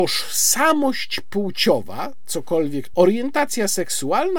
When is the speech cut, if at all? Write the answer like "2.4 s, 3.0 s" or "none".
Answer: 2.9 s